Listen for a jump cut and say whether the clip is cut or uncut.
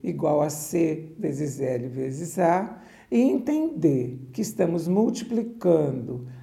uncut